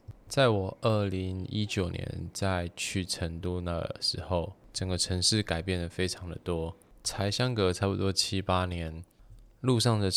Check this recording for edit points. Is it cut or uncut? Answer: uncut